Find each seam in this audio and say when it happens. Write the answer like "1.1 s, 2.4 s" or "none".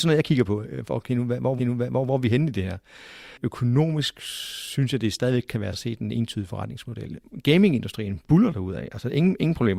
1.6 s, 5.7 s